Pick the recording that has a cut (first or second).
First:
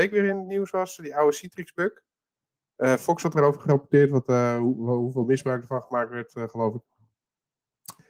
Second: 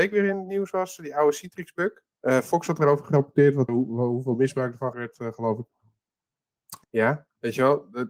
second